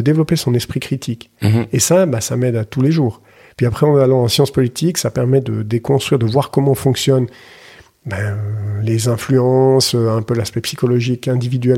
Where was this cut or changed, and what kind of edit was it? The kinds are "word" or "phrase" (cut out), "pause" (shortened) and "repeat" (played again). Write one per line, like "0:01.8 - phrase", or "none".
none